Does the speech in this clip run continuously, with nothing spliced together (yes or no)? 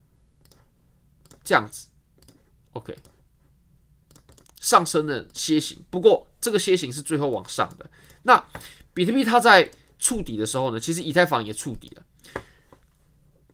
yes